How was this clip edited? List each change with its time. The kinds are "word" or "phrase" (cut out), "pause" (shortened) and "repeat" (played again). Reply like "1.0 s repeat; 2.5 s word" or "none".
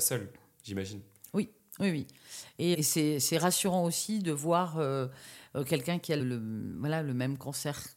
2.7 s word; 6.2 s word